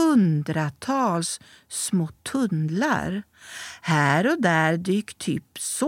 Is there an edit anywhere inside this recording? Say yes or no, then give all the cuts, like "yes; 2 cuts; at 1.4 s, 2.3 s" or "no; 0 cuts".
no; 0 cuts